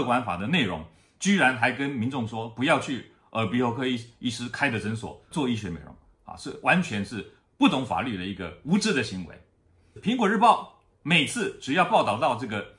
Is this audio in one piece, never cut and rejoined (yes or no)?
no